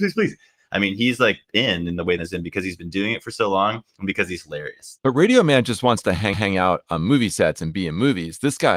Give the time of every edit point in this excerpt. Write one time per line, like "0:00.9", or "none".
0:02.2
0:06.3

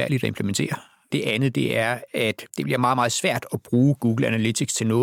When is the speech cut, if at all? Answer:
0:02.5

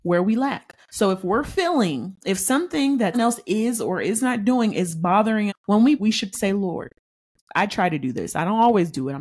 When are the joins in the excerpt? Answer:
0:03.1
0:05.5
0:06.0
0:06.3

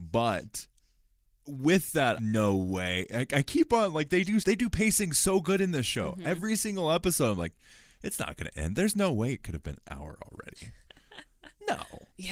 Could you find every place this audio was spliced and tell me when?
0:02.2
0:04.4

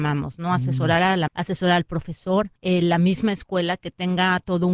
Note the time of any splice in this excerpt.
0:01.3
0:02.6

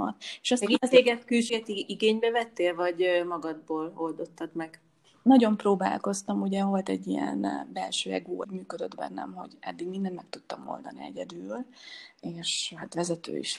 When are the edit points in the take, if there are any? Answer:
0:01.5
0:08.4

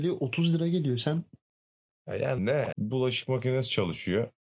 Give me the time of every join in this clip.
0:02.4
0:02.7

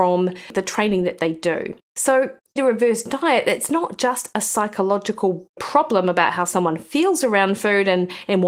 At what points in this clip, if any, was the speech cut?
0:02.6

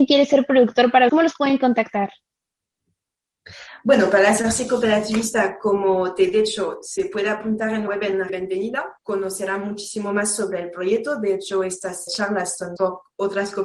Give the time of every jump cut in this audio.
0:01.1
0:07.9
0:08.3
0:09.0
0:12.1
0:12.8

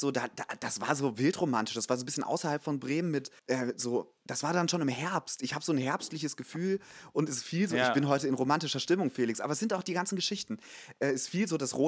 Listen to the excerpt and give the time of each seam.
0:03.4

